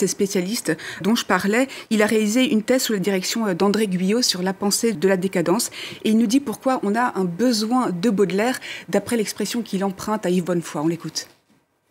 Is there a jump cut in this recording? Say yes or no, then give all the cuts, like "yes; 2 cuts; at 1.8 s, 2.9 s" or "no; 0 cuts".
yes; 2 cuts; at 1.0 s, 4.9 s